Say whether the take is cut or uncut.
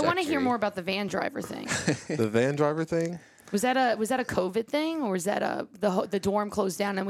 uncut